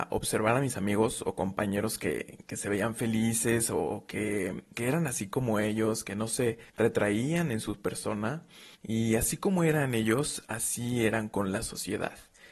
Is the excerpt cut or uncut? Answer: cut